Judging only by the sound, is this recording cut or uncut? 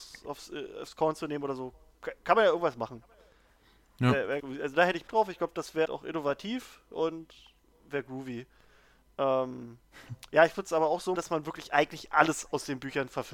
cut